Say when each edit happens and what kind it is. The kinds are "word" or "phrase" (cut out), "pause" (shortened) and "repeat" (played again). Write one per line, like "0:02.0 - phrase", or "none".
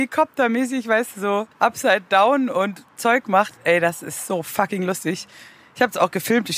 0:01.5 - pause

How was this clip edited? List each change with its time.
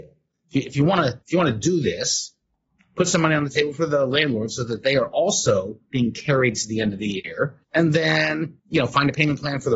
0:01.2 - pause
0:07.6 - pause
0:08.6 - pause

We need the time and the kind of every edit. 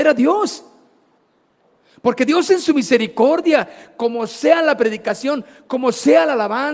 none

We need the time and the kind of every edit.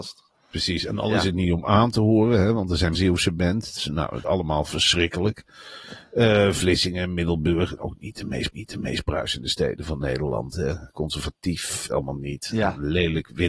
0:02.9 - word
0:04.2 - word
0:07.8 - word
0:08.5 - repeat
0:11.9 - phrase

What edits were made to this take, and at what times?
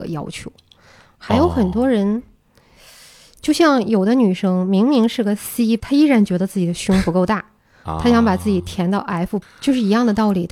0:05.8 - word
0:09.4 - word

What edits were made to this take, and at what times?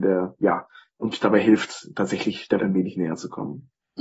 0:02.6 - word

